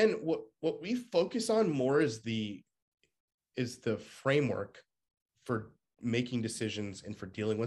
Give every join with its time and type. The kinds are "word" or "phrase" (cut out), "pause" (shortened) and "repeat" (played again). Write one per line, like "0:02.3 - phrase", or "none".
none